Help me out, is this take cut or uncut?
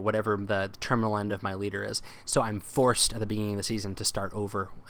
uncut